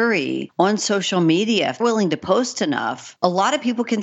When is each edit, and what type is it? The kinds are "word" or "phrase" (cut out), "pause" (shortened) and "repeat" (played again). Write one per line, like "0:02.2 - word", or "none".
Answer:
0:01.8 - word